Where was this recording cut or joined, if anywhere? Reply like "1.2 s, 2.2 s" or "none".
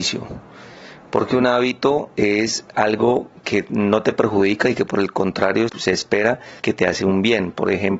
5.7 s, 6.6 s